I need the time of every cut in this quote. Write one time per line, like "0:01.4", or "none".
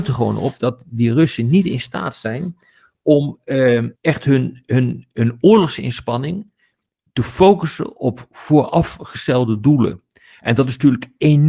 0:04.0